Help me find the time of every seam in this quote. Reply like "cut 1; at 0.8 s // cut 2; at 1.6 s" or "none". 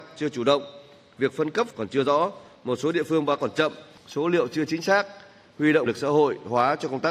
cut 1; at 1.7 s // cut 2; at 3.4 s // cut 3; at 5.9 s